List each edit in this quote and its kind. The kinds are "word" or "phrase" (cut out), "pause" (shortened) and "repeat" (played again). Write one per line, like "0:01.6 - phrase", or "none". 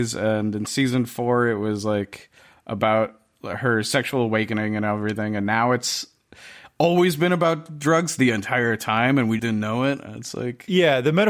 0:09.4 - word